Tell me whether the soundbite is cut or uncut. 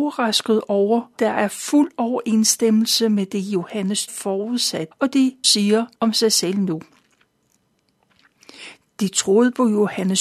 cut